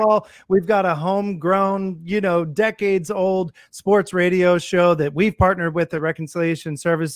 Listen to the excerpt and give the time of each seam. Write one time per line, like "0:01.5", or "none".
none